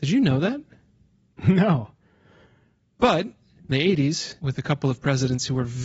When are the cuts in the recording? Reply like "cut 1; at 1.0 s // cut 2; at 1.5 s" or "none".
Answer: cut 1; at 3.7 s // cut 2; at 4.4 s

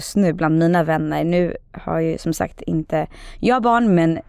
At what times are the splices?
none

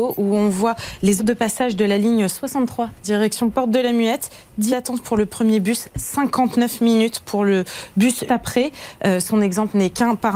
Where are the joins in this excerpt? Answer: cut 1; at 1.2 s // cut 2; at 4.7 s // cut 3; at 8.3 s

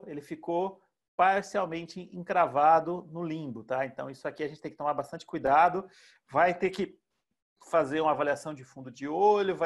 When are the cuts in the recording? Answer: none

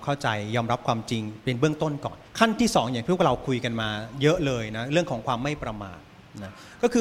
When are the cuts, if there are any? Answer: cut 1; at 2.3 s

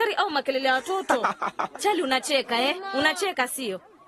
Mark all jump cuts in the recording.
cut 1; at 1.8 s

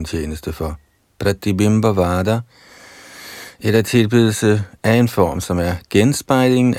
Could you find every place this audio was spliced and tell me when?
none

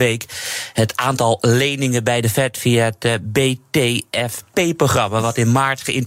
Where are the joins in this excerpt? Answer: none

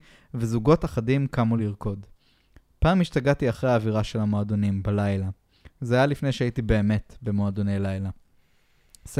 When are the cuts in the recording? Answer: none

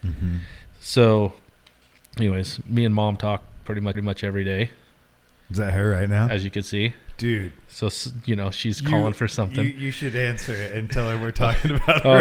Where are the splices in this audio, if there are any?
cut 1; at 3.9 s

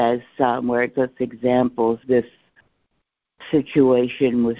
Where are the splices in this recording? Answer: cut 1; at 0.9 s // cut 2; at 2.0 s

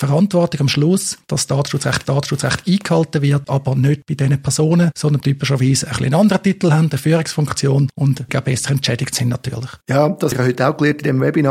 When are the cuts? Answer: cut 1; at 2.0 s // cut 2; at 3.5 s // cut 3; at 5.2 s // cut 4; at 8.3 s // cut 5; at 9.8 s // cut 6; at 10.3 s

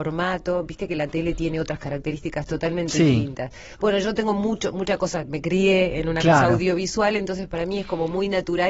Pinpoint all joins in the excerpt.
none

